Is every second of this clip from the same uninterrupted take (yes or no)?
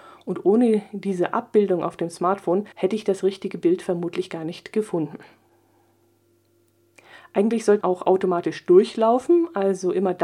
no